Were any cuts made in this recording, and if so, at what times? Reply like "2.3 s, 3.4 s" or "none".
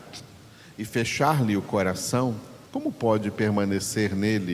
2.7 s